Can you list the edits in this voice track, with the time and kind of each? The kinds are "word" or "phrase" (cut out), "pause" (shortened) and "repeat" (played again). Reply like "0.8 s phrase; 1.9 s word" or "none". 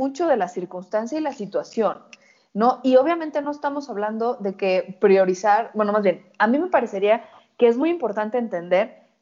none